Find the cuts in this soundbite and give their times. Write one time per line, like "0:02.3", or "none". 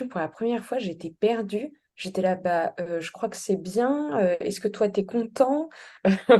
none

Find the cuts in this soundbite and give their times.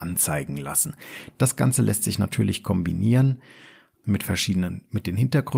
none

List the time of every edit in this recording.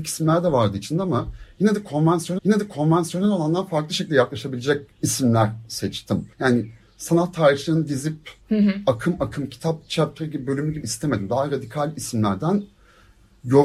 0:02.4
0:04.9
0:06.3
0:08.4
0:10.8

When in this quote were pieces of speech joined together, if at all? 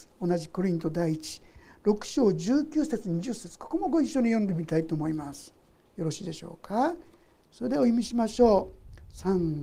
none

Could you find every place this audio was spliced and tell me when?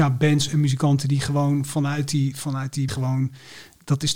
0:02.9

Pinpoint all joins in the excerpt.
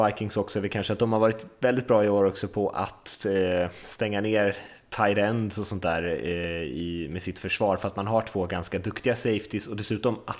none

